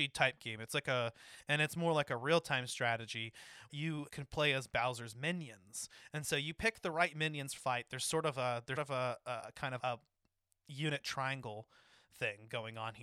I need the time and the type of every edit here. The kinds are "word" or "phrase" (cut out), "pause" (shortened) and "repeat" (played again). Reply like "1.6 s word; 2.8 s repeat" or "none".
3.7 s word; 4.1 s word; 7.6 s word; 8.8 s word; 9.8 s word

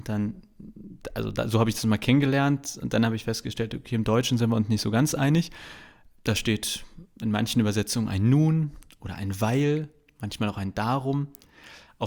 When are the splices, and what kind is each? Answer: none

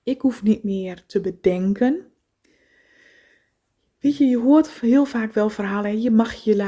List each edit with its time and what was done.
none

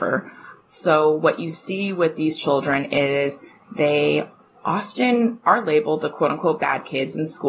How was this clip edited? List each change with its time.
none

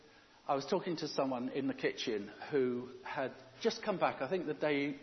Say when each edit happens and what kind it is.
none

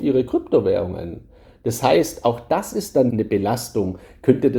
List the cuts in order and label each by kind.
3.1 s word

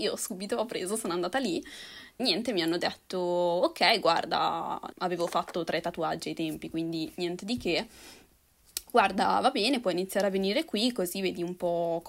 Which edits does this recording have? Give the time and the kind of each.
2.2 s word; 4.9 s word

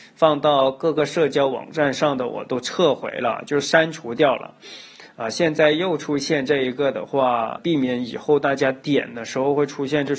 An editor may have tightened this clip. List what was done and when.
7.6 s word

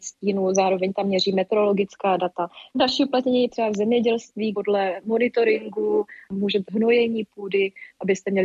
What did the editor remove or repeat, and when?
3.5 s word; 4.5 s word; 6.7 s word

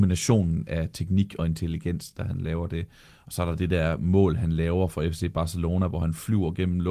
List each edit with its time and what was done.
none

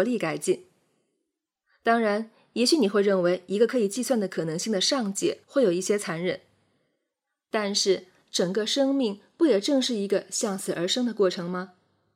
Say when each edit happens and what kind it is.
5.4 s pause

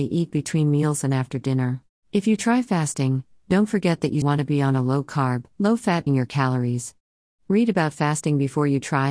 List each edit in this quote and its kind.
2.0 s pause; 4.2 s word; 5.5 s pause; 6.1 s phrase

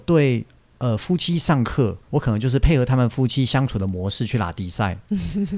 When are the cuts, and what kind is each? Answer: 2.0 s pause

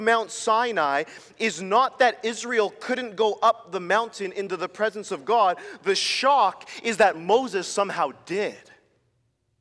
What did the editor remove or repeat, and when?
none

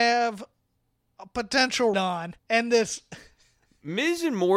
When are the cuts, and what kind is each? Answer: 1.9 s word; 2.4 s pause

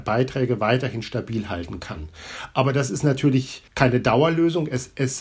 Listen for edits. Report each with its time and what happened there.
3.7 s pause

